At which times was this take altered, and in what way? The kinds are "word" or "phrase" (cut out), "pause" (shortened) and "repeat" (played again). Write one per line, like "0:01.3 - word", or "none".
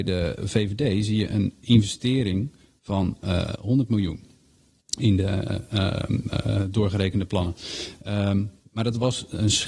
none

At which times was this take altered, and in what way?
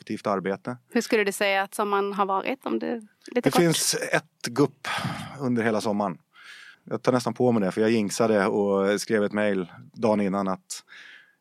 0:06.7 - pause

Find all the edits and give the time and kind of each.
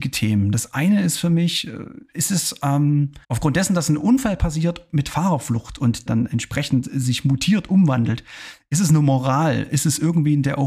0:03.2 - pause
0:06.1 - phrase

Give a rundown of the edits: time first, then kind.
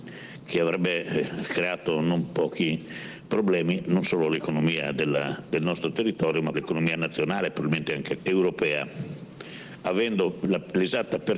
0:06.5 - word
0:08.2 - word

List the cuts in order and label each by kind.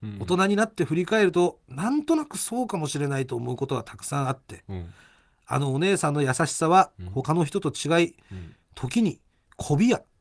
none

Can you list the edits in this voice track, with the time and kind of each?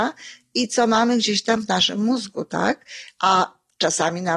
none

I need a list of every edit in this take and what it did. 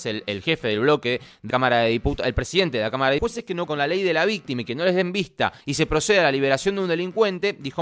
0:01.5 - word
0:03.2 - phrase
0:03.7 - word
0:05.6 - pause

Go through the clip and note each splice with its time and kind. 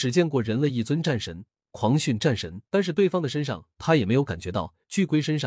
0:02.7 - pause

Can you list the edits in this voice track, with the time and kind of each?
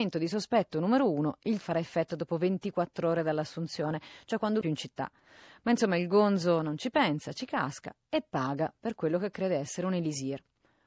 0:01.6 - phrase
0:04.6 - phrase

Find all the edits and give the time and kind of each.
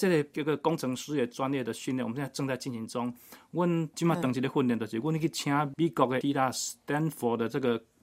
0:06.2 - word

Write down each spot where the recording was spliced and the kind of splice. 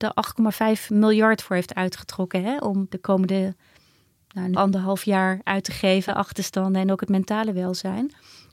0:02.9 - word
0:04.5 - word
0:06.1 - word

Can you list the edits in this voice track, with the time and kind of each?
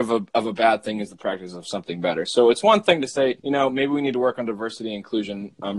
0:03.4 - pause

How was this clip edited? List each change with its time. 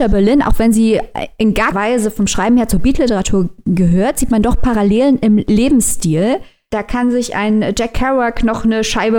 0:01.7 - word

